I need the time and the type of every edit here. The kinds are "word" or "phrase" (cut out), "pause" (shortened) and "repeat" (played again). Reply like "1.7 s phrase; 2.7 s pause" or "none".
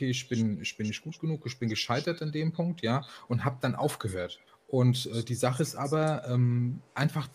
4.5 s pause